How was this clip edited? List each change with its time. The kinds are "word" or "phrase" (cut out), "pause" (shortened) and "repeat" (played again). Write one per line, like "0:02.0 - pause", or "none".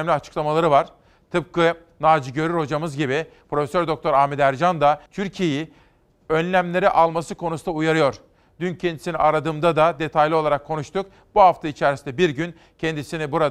0:05.1 - pause